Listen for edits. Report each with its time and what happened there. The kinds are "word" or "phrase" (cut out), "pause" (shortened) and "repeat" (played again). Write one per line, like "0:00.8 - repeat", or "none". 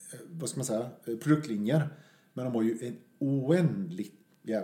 none